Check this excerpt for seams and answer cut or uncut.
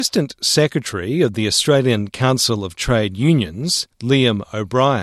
cut